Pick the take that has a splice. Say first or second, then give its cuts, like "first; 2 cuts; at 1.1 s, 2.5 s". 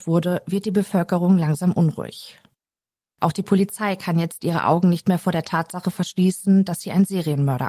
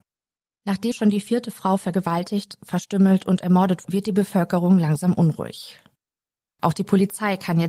second; 2 cuts; at 0.9 s, 3.8 s